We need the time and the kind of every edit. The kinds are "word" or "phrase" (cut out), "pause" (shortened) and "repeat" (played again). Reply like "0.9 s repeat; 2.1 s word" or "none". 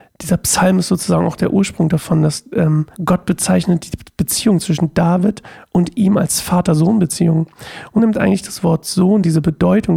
2.9 s pause; 8.0 s word